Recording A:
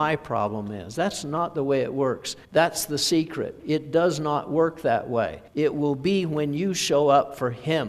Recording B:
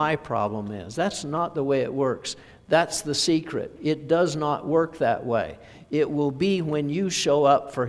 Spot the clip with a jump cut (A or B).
A